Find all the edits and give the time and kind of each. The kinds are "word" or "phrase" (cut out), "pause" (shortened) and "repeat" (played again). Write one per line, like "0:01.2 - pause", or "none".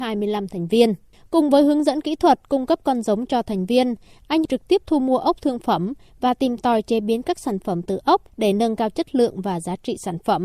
0:08.3 - pause